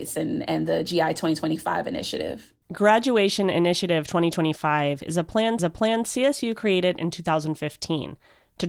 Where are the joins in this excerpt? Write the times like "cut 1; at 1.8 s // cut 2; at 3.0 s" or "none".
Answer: cut 1; at 2.6 s // cut 2; at 5.6 s

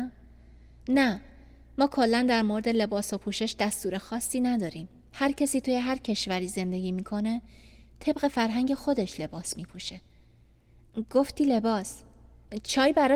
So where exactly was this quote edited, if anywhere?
none

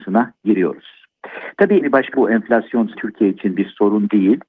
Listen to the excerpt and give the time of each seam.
cut 1; at 1.8 s // cut 2; at 2.1 s // cut 3; at 2.9 s

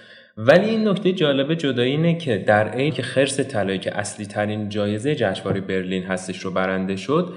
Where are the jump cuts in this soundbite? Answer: cut 1; at 2.9 s

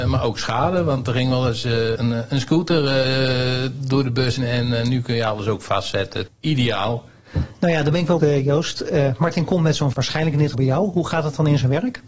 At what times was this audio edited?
cut 1; at 2.0 s // cut 2; at 4.4 s // cut 3; at 6.3 s // cut 4; at 8.2 s // cut 5; at 9.9 s // cut 6; at 10.5 s

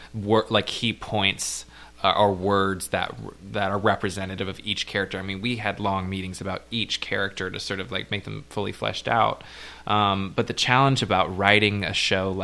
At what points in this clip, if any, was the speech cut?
cut 1; at 1.9 s

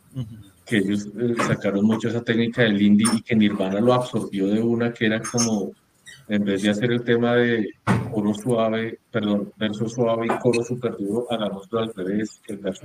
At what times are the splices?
none

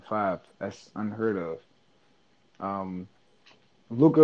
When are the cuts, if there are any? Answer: none

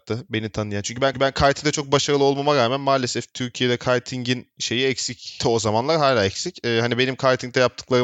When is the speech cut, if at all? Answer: cut 1; at 1.1 s

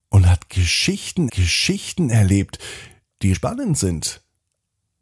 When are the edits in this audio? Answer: cut 1; at 1.3 s // cut 2; at 3.3 s

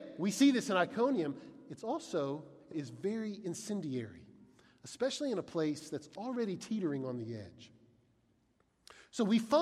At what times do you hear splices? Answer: cut 1; at 2.7 s

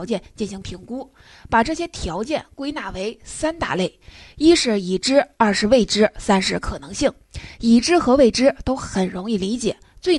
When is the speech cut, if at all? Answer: none

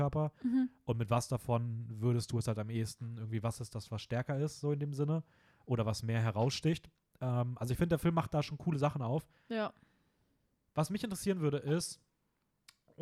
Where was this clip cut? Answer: none

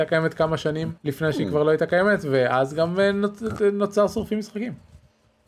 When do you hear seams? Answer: cut 1; at 1.0 s

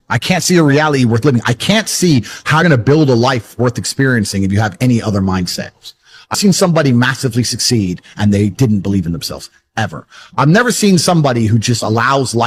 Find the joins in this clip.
cut 1; at 2.6 s // cut 2; at 6.3 s

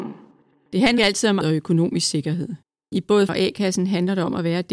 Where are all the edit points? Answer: cut 1; at 1.0 s // cut 2; at 1.4 s // cut 3; at 3.3 s

